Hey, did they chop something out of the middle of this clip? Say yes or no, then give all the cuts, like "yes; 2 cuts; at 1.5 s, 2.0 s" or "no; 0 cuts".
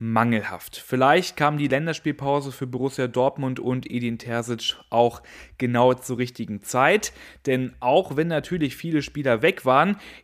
no; 0 cuts